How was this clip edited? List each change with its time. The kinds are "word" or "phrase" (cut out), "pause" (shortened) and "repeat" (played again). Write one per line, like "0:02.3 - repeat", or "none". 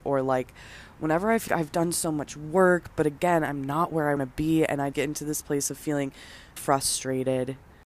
0:01.5 - word
0:04.2 - word
0:04.9 - word
0:06.6 - word